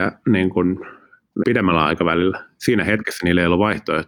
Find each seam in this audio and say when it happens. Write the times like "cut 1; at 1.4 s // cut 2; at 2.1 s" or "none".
cut 1; at 1.4 s